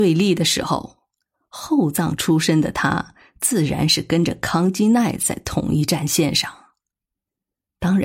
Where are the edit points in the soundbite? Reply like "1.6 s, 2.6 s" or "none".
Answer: none

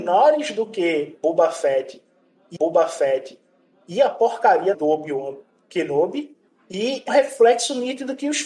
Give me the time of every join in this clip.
2.6 s, 4.7 s, 6.5 s, 7.1 s

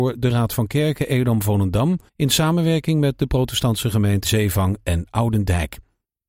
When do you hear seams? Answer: 2.1 s, 4.2 s

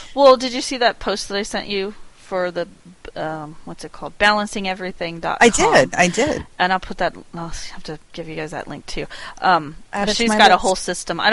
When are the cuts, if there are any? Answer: none

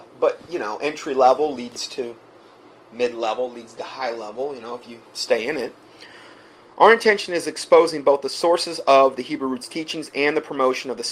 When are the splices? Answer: none

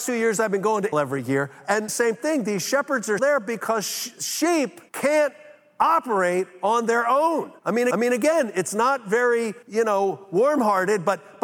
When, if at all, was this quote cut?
0.9 s, 1.9 s, 3.2 s, 4.9 s, 7.6 s, 7.9 s, 9.6 s

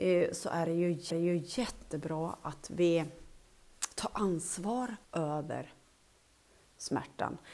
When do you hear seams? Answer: 1.1 s, 5.0 s

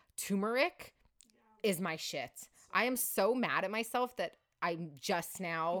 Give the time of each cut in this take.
none

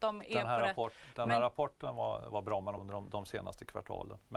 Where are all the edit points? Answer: 2.3 s, 2.8 s

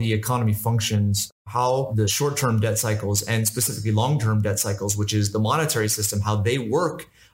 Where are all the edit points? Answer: none

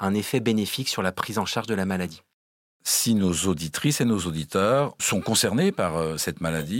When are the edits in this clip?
none

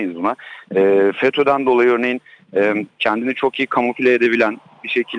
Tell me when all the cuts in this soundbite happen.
none

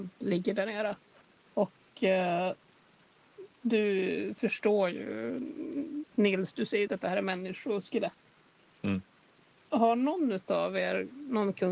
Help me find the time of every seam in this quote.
6.9 s

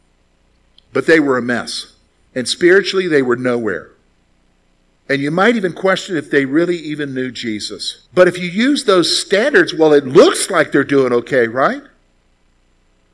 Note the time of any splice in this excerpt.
2.1 s, 8.1 s

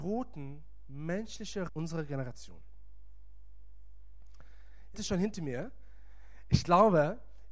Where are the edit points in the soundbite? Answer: 1.7 s, 4.9 s

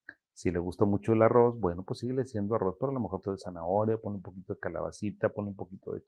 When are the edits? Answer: 3.2 s

